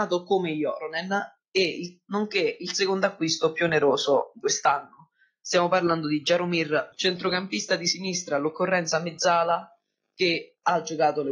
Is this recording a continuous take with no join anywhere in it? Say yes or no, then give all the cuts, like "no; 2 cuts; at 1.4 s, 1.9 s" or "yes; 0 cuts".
no; 2 cuts; at 4.4 s, 6.9 s